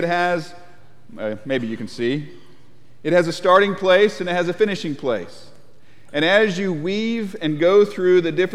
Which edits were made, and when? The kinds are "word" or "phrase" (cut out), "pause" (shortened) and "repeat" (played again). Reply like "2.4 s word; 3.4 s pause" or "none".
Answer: none